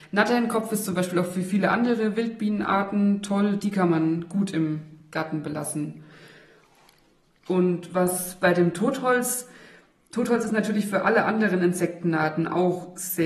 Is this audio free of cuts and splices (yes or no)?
yes